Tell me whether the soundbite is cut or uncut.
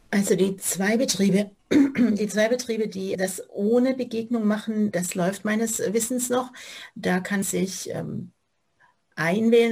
cut